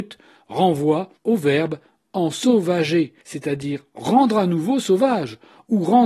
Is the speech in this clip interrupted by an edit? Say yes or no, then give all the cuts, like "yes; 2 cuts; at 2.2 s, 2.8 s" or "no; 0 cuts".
yes; 2 cuts; at 1.2 s, 3.2 s